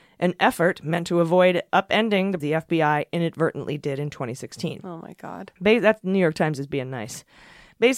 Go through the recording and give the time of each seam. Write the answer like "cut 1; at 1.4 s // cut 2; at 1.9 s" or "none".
cut 1; at 2.4 s // cut 2; at 5.6 s